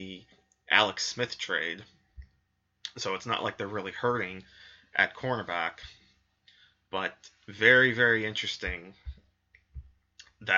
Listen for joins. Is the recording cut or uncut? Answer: uncut